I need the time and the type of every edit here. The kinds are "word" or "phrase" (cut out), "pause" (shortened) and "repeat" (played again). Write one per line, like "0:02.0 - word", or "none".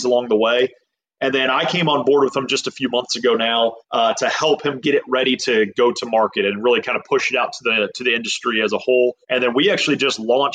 0:03.8 - pause
0:09.2 - pause